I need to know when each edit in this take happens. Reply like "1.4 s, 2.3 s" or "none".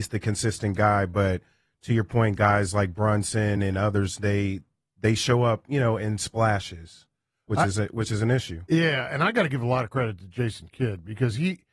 none

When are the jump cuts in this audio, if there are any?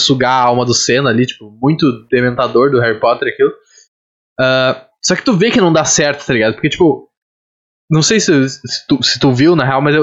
none

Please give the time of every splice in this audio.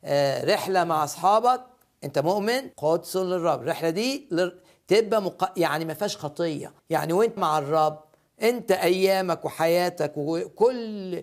2.7 s, 6.8 s, 7.4 s

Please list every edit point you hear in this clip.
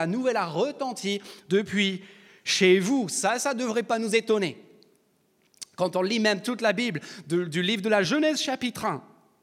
none

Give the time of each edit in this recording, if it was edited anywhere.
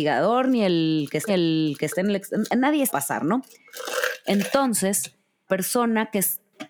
1.3 s, 2.9 s, 5.5 s

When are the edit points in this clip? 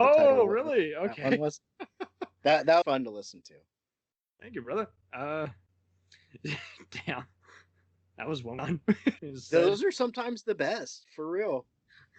2.8 s, 8.6 s, 9.2 s

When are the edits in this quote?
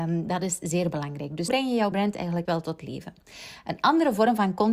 1.5 s, 1.9 s, 2.4 s

